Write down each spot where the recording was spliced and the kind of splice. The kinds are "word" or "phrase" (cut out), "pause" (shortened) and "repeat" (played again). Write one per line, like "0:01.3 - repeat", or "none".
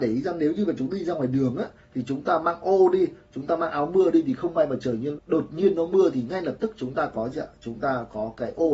0:05.2 - word